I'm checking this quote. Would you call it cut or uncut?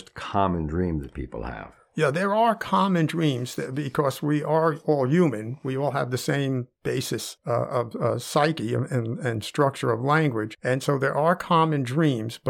uncut